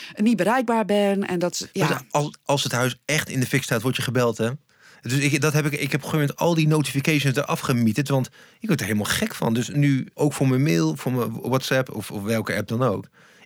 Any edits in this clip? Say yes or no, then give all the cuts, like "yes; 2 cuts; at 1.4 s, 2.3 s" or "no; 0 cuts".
no; 0 cuts